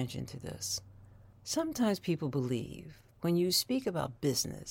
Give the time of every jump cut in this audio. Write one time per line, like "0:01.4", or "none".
0:03.1